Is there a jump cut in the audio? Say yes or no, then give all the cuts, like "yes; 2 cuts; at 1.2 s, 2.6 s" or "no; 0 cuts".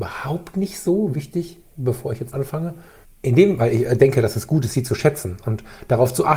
yes; 2 cuts; at 2.3 s, 3.0 s